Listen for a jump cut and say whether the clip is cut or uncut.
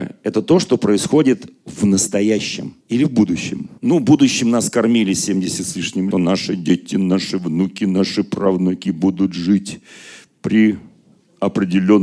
cut